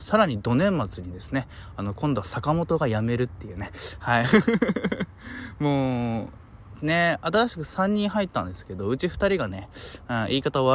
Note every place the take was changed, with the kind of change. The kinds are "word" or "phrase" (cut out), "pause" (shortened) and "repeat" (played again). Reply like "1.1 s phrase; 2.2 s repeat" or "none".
none